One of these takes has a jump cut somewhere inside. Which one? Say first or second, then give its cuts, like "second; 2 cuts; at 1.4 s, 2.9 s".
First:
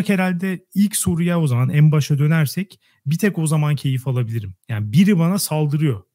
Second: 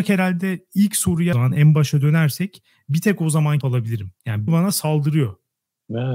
second; 3 cuts; at 1.3 s, 3.6 s, 4.5 s